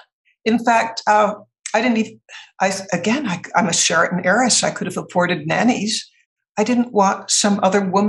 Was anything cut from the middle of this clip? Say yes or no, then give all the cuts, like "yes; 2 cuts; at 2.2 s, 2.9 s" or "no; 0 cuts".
no; 0 cuts